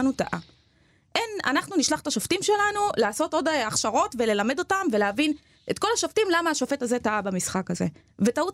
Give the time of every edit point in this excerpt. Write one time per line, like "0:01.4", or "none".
none